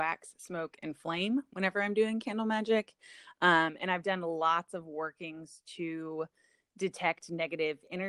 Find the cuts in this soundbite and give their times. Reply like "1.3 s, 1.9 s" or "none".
none